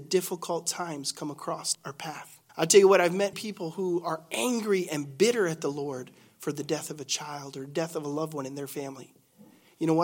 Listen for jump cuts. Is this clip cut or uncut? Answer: cut